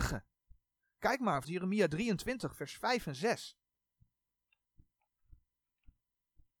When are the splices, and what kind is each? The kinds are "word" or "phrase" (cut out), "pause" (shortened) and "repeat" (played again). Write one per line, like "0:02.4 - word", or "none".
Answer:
0:01.4 - word

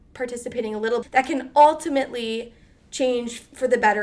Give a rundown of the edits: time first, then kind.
0:01.0 - word

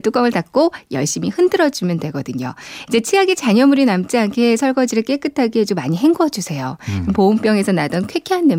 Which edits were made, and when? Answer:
none

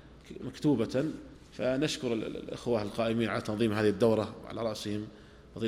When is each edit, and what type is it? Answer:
none

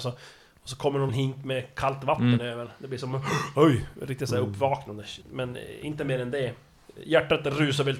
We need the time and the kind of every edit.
0:01.1 - phrase
0:05.2 - pause

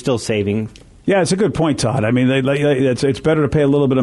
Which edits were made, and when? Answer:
none

